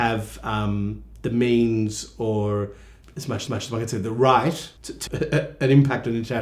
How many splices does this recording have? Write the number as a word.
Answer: four